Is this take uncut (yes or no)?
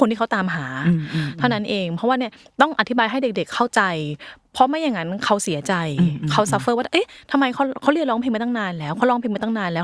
yes